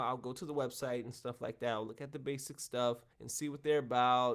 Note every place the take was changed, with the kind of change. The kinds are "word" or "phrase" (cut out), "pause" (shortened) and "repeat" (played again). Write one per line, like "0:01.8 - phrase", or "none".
0:03.1 - pause